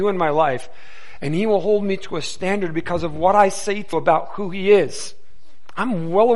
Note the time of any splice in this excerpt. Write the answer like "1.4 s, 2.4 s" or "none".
3.9 s